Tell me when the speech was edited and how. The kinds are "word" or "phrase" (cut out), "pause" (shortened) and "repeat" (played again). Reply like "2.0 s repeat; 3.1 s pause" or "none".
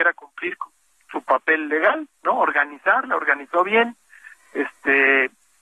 2.1 s pause